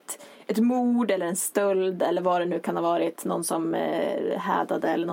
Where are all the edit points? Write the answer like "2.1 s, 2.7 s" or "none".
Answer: none